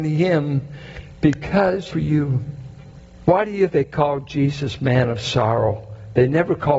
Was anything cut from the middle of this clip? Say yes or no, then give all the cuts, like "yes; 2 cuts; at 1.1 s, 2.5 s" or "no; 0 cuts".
yes; 3 cuts; at 1.9 s, 3.1 s, 3.7 s